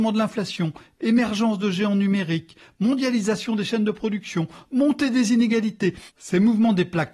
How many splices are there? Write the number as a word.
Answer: one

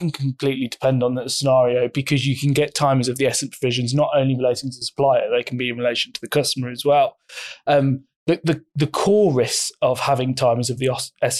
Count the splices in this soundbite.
zero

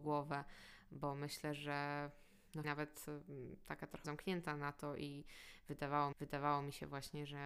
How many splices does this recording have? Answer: three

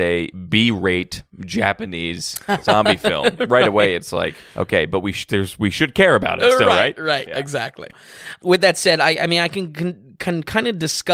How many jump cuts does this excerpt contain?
two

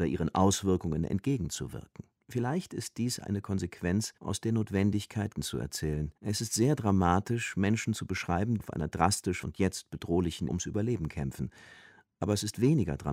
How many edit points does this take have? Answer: eight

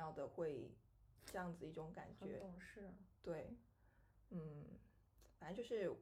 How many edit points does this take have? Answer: zero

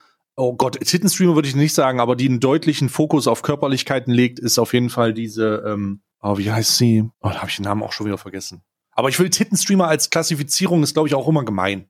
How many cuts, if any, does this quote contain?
two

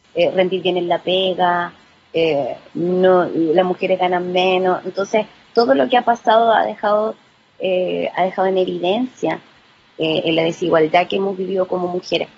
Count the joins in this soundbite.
zero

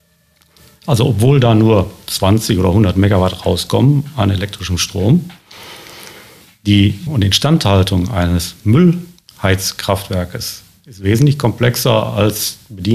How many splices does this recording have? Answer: one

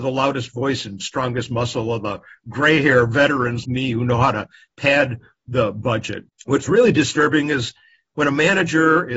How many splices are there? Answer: two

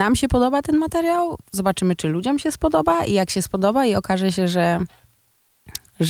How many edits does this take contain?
one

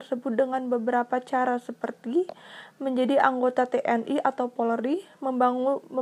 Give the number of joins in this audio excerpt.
zero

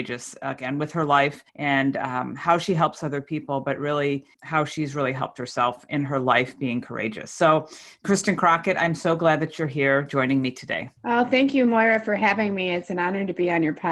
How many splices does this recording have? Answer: three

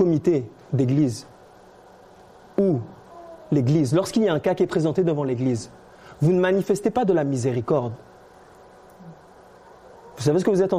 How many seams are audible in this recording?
zero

